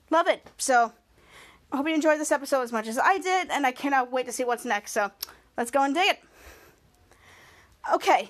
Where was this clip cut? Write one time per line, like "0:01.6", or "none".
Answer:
none